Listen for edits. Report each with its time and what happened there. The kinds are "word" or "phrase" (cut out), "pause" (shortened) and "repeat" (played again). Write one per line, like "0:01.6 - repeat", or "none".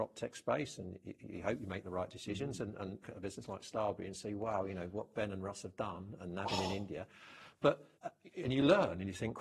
0:03.0 - phrase
0:07.9 - pause